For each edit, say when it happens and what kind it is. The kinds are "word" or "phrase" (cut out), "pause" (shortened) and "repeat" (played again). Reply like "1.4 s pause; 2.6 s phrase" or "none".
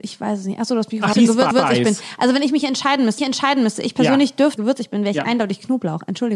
1.1 s word; 1.5 s repeat; 3.2 s repeat; 4.6 s phrase